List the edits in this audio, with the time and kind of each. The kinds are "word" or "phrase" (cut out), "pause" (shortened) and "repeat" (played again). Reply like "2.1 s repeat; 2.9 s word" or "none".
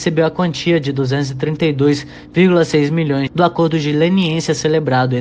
3.3 s phrase